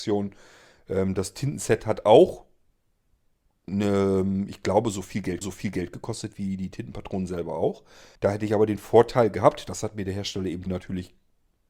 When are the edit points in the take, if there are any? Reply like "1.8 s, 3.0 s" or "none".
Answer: 5.4 s, 8.2 s, 10.7 s